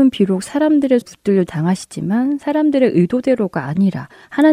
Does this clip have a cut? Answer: yes; 2 cuts; at 1.0 s, 1.5 s

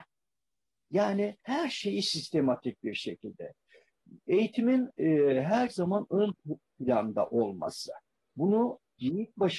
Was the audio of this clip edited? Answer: yes; 2 cuts; at 1.4 s, 8.1 s

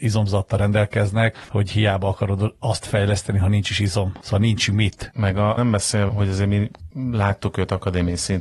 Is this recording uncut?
no; 2 cuts; at 5.6 s, 6.1 s

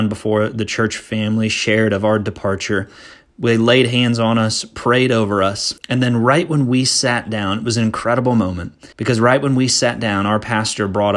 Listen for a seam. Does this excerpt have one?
yes; 2 cuts; at 5.8 s, 8.9 s

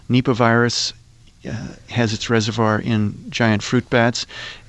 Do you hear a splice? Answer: no; 0 cuts

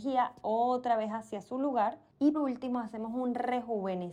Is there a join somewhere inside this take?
yes; 1 cut; at 2.3 s

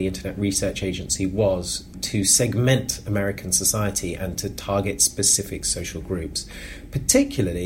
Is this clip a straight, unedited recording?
yes; 0 cuts

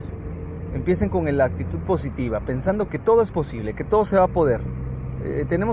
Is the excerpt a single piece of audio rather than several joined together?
no; 1 cut; at 2.9 s

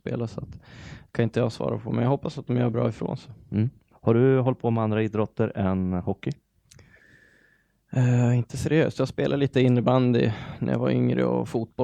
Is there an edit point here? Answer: yes; 1 cut; at 3.9 s

